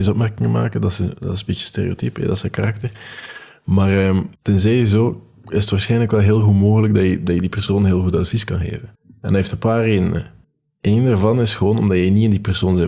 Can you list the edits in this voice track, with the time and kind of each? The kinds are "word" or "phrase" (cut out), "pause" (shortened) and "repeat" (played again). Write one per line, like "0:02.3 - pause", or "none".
0:04.3 - pause
0:08.9 - pause
0:10.4 - pause